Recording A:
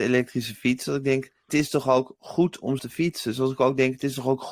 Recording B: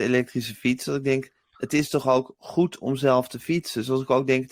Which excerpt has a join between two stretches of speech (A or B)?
A